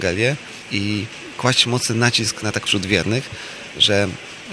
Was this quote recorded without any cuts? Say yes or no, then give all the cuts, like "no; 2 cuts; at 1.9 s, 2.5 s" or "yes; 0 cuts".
no; 1 cut; at 2.7 s